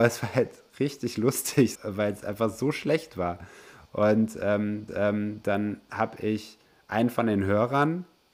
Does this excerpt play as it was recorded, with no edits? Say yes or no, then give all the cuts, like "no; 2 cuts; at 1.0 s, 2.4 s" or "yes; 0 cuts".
no; 2 cuts; at 1.7 s, 4.9 s